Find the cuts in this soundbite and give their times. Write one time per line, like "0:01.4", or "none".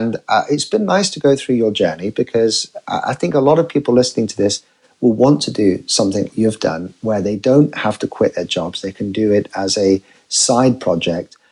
0:06.3